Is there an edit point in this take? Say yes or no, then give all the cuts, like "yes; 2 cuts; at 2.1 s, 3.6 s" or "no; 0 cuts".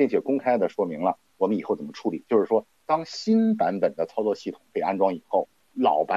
no; 0 cuts